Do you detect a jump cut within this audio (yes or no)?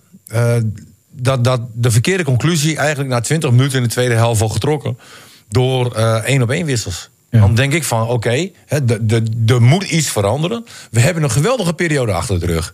no